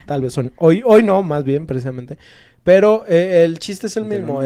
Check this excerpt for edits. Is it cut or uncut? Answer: uncut